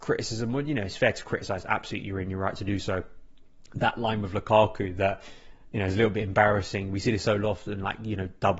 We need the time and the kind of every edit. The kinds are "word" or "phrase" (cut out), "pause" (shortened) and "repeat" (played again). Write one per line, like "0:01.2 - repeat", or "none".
none